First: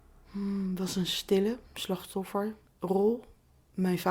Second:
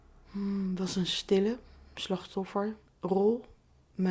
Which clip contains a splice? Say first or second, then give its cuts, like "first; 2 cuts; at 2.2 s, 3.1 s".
first; 1 cut; at 1.7 s